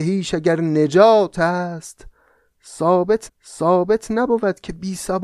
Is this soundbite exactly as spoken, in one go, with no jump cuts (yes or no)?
no